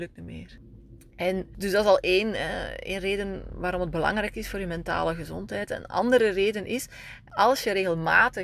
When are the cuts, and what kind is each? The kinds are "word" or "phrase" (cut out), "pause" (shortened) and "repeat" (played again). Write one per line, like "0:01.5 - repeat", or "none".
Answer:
none